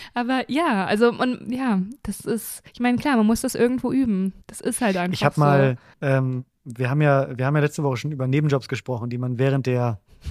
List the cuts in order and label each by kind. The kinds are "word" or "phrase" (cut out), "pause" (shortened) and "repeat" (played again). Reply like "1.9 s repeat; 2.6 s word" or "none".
2.7 s pause; 4.4 s pause; 5.9 s pause